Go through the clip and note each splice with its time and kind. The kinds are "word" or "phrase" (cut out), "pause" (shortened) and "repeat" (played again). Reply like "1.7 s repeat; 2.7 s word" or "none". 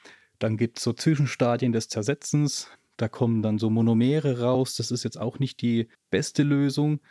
2.7 s pause; 5.9 s pause